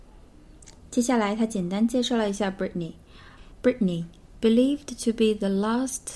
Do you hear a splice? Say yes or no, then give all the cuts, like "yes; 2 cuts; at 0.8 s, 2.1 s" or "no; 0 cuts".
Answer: yes; 1 cut; at 3.5 s